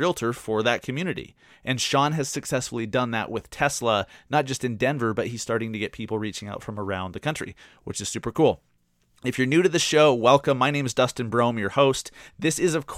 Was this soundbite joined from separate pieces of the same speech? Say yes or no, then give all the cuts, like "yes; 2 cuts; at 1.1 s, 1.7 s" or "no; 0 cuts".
no; 0 cuts